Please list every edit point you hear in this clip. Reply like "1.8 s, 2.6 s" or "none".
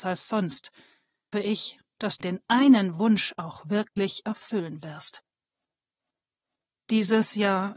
1.3 s, 2.2 s